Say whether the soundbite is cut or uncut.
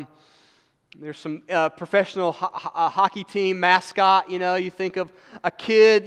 uncut